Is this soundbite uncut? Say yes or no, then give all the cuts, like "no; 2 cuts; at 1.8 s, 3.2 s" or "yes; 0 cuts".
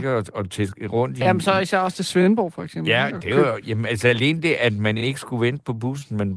yes; 0 cuts